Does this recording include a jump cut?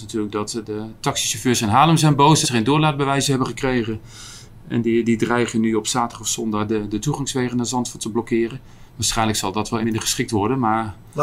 yes; 3 cuts; at 2.4 s, 8.9 s, 9.8 s

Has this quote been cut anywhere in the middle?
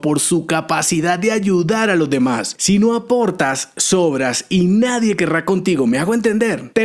no; 0 cuts

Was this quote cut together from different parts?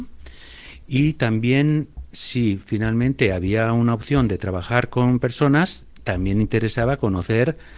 no; 0 cuts

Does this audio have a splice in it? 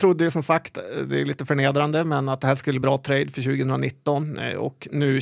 yes; 1 cut; at 2.8 s

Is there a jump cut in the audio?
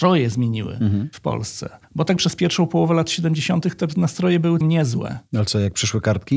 yes; 3 cuts; at 1.8 s, 2.2 s, 4.6 s

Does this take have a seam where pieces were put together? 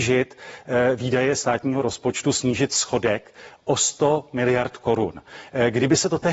no; 0 cuts

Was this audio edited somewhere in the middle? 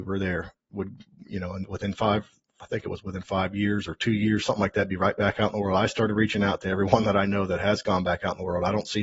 no; 0 cuts

